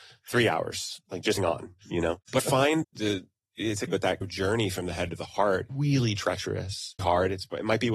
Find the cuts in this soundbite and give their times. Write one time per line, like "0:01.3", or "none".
0:01.4
0:02.4
0:02.8
0:03.9
0:04.2
0:05.7
0:07.0